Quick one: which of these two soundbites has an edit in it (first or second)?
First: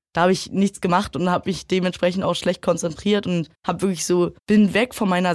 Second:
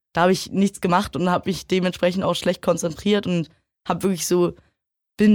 first